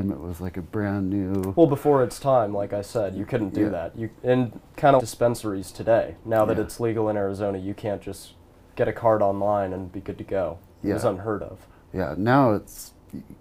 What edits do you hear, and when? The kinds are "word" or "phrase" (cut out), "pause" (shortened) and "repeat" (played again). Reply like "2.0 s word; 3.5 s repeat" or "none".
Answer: 5.0 s word